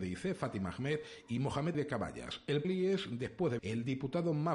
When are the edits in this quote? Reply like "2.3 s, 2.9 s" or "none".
1.7 s, 2.6 s, 3.6 s